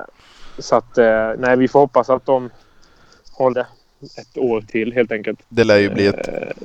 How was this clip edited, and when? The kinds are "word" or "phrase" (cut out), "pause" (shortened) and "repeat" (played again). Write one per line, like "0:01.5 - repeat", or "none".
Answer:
0:03.5 - word
0:05.4 - pause